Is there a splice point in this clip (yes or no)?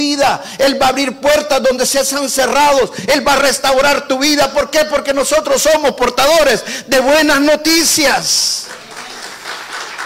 no